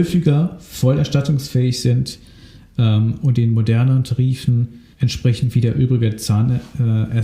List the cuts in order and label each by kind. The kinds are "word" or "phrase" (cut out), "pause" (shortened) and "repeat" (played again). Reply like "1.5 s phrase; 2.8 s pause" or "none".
4.9 s pause